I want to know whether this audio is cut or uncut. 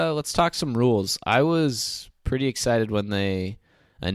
uncut